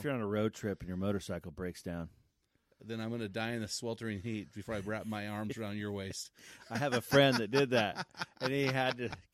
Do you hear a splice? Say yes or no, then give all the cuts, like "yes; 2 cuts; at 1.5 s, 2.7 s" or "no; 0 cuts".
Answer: no; 0 cuts